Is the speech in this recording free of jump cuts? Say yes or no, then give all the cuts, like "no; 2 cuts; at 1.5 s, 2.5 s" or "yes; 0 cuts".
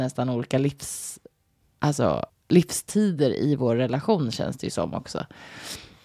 no; 1 cut; at 2.3 s